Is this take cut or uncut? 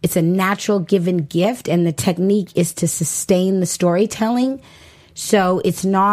uncut